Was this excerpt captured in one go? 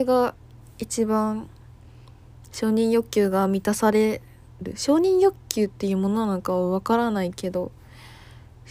yes; 0 cuts

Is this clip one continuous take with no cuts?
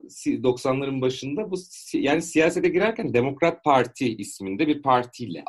yes; 0 cuts

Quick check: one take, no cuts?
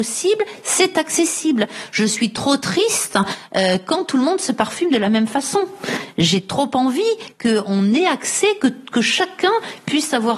yes; 0 cuts

